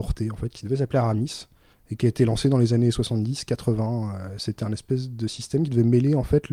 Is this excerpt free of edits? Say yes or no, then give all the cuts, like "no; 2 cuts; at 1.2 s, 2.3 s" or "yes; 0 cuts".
no; 1 cut; at 1.7 s